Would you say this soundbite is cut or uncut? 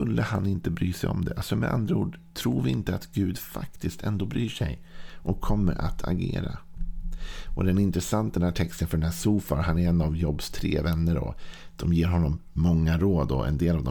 uncut